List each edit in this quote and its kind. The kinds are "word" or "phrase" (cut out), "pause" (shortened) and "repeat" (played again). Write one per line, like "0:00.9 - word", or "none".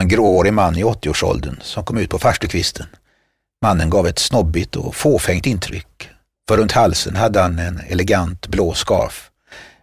none